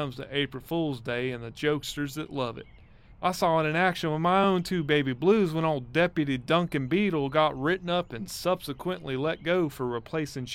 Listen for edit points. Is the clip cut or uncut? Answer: uncut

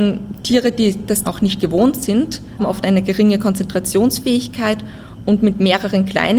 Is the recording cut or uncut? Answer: cut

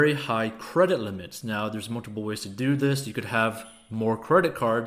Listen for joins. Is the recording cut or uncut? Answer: uncut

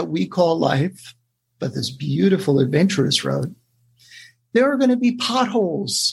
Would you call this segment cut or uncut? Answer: uncut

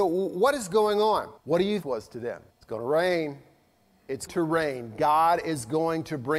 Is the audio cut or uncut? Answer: cut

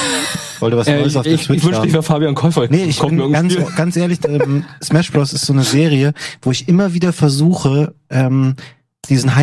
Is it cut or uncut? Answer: uncut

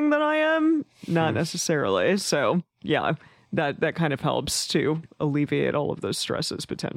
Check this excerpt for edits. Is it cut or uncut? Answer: uncut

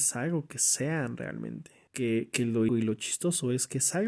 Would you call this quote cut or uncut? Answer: cut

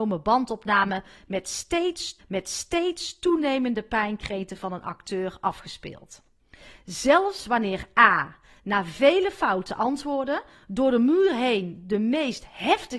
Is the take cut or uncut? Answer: cut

